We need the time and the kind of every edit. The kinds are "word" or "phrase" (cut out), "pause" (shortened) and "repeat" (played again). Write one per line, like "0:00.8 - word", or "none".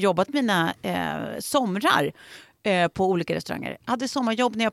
none

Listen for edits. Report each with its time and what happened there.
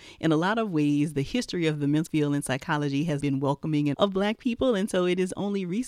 0:02.1 - word
0:03.2 - word
0:03.9 - word

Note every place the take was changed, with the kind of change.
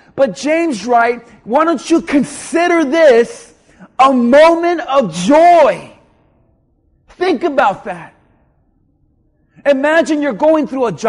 none

